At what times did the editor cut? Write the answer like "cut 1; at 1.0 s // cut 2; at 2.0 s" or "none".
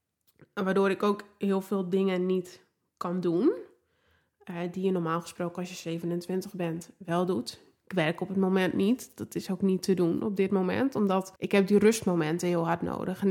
cut 1; at 11.4 s